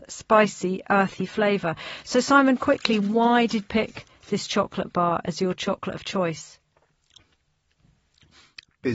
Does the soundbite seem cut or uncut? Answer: cut